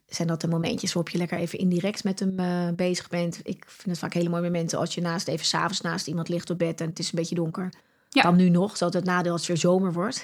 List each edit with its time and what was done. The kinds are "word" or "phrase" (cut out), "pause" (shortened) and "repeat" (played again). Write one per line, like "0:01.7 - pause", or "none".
none